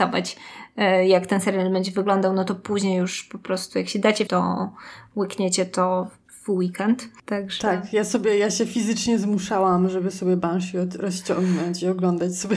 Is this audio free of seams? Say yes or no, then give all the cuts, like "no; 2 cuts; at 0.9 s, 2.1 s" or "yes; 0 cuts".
no; 1 cut; at 4.3 s